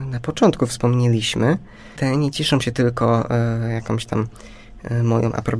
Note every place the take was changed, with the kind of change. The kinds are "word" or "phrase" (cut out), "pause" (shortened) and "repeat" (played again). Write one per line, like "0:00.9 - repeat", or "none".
0:02.0 - word